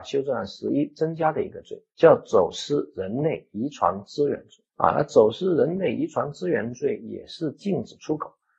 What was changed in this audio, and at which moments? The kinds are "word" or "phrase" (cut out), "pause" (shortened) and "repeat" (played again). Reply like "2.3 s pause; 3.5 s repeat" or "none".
1.9 s pause; 4.7 s pause